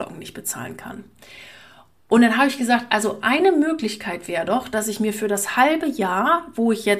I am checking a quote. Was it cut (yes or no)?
no